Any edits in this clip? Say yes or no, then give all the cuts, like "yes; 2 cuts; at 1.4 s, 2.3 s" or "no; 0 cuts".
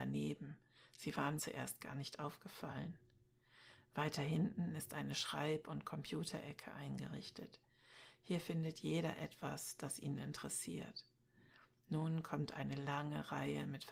yes; 1 cut; at 1.4 s